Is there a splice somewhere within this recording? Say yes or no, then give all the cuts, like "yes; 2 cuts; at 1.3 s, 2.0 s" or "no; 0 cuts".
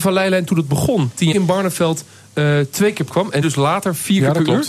yes; 3 cuts; at 1.3 s, 3.1 s, 3.4 s